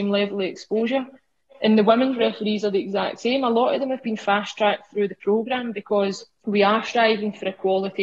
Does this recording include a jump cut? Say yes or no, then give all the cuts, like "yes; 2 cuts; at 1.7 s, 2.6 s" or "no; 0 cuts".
no; 0 cuts